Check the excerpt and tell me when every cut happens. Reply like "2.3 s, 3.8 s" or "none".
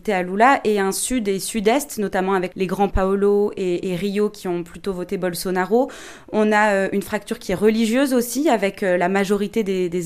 2.5 s, 2.9 s